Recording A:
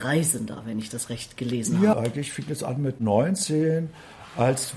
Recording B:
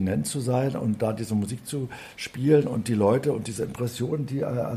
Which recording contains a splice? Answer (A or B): B